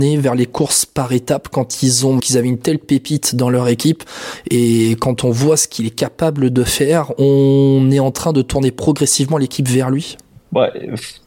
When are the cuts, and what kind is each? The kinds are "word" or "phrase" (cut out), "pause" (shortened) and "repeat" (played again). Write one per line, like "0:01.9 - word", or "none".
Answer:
0:02.2 - word